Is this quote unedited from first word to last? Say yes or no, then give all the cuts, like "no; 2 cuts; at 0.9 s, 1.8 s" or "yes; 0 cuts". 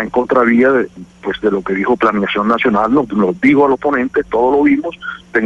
yes; 0 cuts